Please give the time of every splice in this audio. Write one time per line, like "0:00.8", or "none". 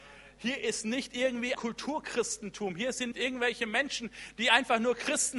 0:01.5
0:03.1